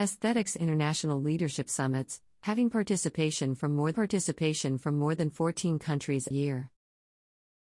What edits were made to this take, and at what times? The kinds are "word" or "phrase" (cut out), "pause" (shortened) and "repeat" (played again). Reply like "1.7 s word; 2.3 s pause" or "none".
3.9 s repeat; 6.3 s word